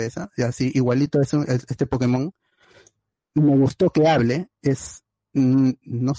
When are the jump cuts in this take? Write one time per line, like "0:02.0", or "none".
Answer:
none